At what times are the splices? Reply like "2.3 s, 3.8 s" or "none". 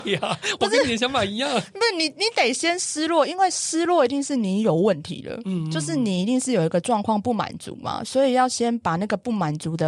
none